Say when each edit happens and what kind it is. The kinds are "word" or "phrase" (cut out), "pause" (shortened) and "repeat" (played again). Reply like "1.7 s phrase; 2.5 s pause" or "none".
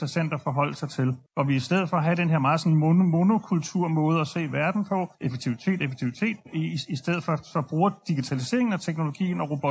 1.3 s pause; 5.1 s pause